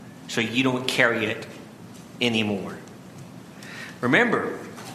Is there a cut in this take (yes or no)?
no